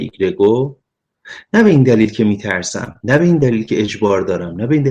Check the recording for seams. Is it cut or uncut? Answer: cut